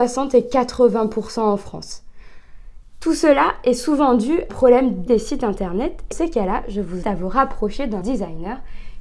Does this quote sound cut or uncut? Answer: cut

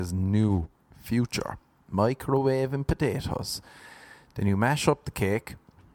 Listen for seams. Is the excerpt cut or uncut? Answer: uncut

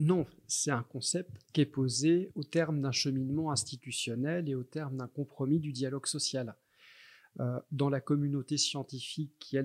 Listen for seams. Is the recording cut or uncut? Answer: cut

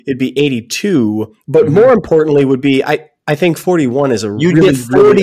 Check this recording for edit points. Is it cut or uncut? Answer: uncut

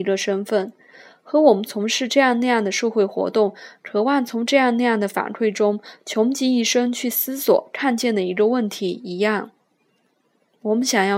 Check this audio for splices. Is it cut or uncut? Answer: uncut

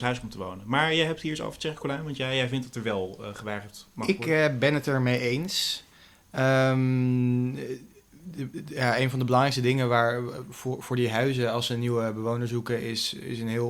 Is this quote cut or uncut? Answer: uncut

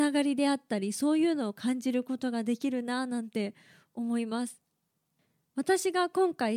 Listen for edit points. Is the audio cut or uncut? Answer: uncut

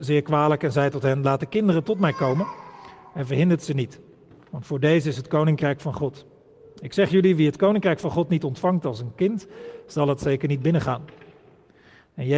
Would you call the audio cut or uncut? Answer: uncut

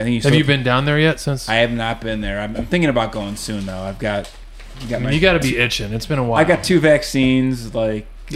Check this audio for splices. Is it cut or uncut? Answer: uncut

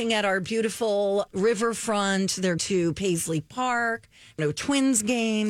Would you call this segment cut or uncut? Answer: cut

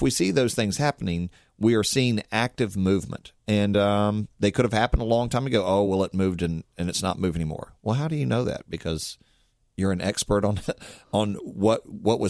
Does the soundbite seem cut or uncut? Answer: uncut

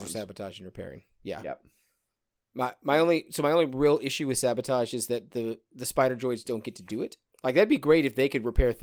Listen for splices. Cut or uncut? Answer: uncut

